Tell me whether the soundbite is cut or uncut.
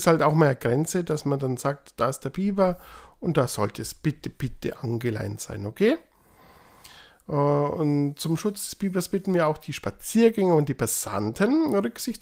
uncut